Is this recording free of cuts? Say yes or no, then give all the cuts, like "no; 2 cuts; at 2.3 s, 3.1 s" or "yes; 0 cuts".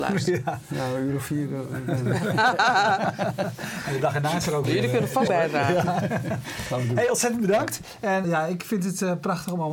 no; 2 cuts; at 5.3 s, 8.2 s